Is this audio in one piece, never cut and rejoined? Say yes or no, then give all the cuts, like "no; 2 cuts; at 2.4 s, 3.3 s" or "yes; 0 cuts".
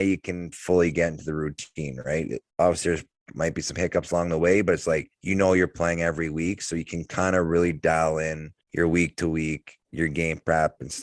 no; 3 cuts; at 5.1 s, 8.6 s, 9.8 s